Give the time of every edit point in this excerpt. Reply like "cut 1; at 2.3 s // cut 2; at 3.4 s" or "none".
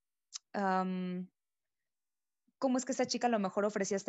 none